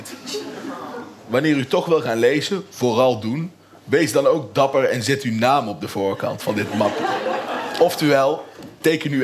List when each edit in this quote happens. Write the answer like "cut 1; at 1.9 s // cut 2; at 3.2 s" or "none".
none